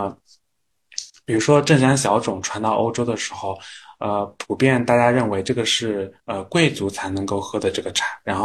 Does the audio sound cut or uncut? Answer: cut